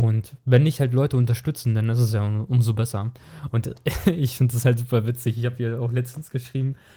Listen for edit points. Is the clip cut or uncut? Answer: uncut